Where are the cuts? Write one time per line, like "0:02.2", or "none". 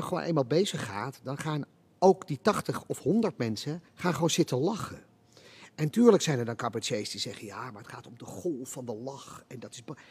0:03.9